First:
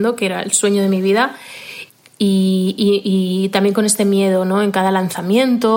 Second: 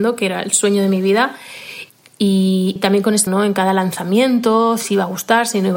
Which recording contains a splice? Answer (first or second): second